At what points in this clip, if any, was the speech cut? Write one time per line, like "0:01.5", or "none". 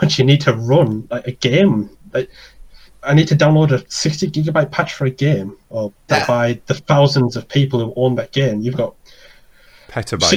0:02.9
0:06.1
0:08.7

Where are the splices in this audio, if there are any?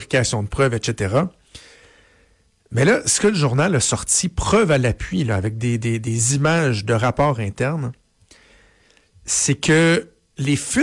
none

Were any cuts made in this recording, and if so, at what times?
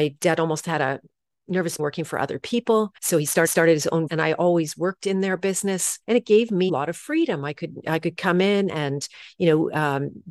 0:01.8
0:03.0
0:03.4
0:04.1
0:06.0
0:06.7

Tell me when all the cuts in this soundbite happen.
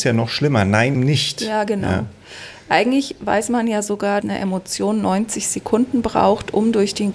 0:01.0
0:04.2

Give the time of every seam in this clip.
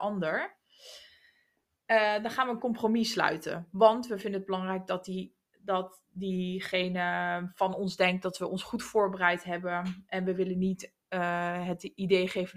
none

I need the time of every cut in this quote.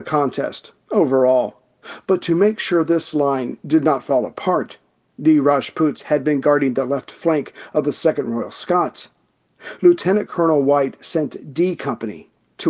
none

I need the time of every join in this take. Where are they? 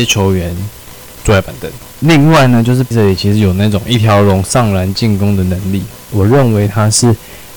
0:02.9

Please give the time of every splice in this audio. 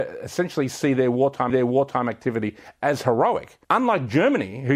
0:01.5
0:03.6

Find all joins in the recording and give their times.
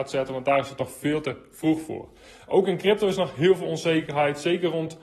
none

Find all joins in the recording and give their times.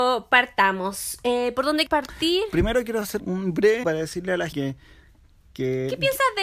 0:01.9
0:03.2
0:03.8
0:04.5

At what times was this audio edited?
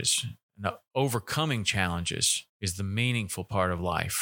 0:02.5

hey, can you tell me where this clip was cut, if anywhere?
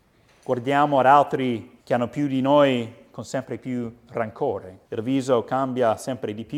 0:01.8
0:04.8

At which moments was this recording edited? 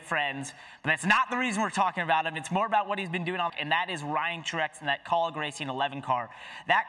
0:03.5

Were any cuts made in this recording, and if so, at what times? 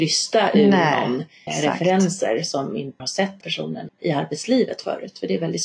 0:01.5
0:03.0
0:03.4
0:03.9

